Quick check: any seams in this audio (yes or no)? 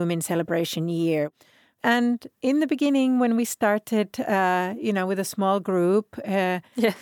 no